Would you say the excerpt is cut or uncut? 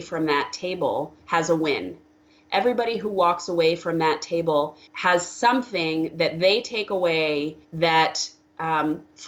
cut